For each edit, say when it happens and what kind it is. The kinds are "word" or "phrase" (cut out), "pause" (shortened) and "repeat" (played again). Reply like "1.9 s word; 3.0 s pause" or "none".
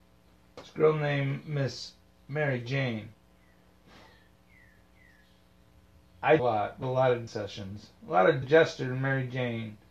6.4 s phrase; 6.8 s word; 7.3 s word; 8.4 s phrase